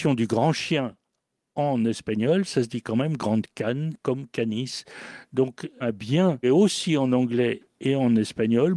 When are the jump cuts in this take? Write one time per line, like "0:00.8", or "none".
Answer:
0:03.5
0:05.8
0:06.4